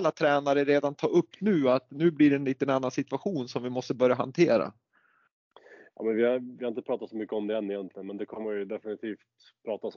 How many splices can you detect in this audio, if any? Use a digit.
0